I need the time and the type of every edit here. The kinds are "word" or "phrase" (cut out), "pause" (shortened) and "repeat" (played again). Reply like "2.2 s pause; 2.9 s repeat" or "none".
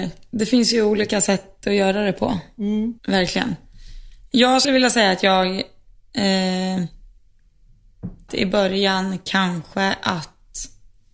3.0 s pause; 4.6 s word; 8.3 s phrase